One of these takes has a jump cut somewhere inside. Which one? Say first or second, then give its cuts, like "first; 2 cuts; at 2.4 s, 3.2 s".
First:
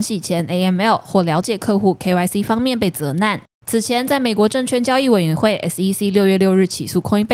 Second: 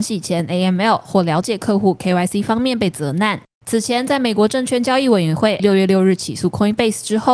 second; 1 cut; at 5.6 s